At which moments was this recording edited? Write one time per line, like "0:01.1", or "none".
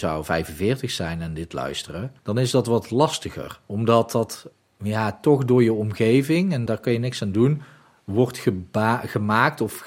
0:02.2
0:03.6
0:06.7